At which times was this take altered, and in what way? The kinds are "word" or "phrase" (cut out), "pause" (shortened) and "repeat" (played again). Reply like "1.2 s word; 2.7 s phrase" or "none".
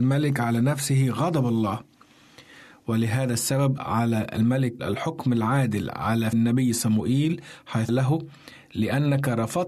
3.8 s word; 4.8 s word; 6.3 s word; 7.9 s word